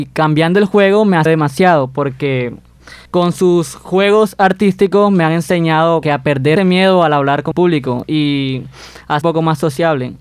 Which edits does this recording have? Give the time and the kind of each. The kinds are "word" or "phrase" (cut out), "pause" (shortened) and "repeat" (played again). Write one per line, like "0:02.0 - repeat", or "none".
0:01.3 - word
0:03.1 - pause
0:06.0 - word
0:06.6 - word
0:07.5 - word
0:09.2 - phrase

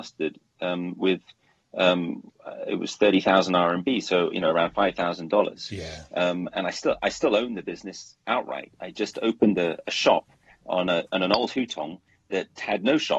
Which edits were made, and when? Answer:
none

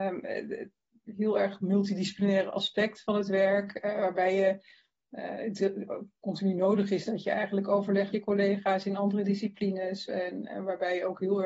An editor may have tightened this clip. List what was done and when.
0:08.1 - word

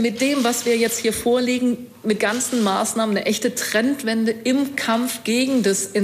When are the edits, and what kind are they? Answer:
0:02.2 - word

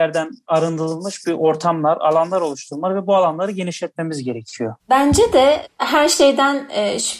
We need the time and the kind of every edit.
0:04.8 - pause

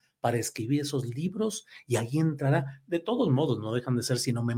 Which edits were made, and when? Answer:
none

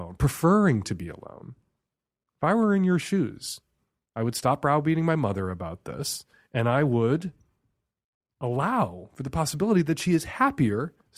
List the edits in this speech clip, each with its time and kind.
none

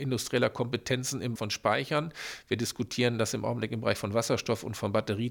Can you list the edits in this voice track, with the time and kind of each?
0:01.4 - word

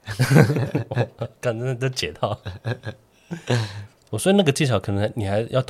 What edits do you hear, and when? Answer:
none

